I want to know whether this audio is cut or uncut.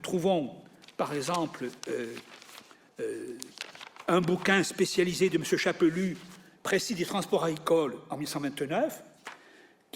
uncut